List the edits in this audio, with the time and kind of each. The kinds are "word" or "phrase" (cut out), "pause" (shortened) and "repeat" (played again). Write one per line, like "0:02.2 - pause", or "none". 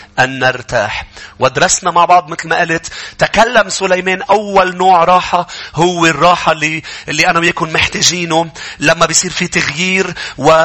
none